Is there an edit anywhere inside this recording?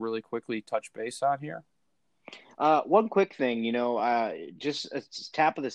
no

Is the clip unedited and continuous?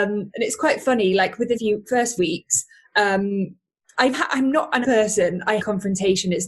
no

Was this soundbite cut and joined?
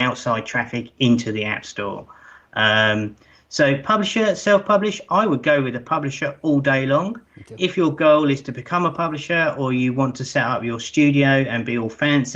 no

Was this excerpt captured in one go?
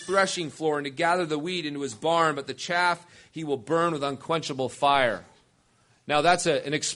yes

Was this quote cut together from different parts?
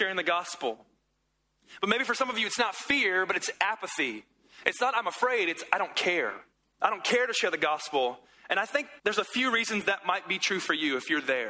yes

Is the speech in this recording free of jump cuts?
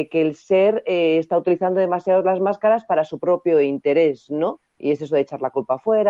no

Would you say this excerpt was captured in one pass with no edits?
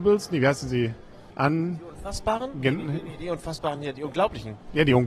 yes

